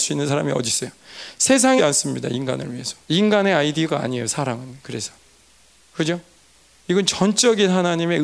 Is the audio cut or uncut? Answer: cut